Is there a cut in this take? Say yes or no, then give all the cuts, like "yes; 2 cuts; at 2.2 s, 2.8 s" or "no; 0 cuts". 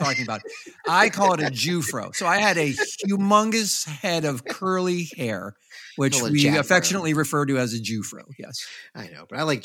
no; 0 cuts